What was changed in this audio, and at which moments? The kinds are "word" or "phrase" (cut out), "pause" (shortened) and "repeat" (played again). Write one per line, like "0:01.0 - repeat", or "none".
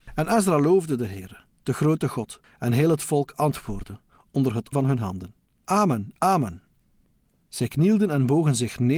0:04.7 - word